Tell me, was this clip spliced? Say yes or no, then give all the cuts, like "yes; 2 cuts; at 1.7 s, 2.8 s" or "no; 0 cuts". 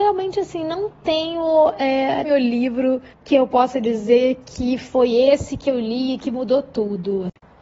yes; 2 cuts; at 2.2 s, 3.1 s